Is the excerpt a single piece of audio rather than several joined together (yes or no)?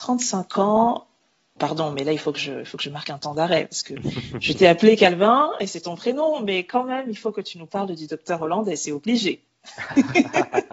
yes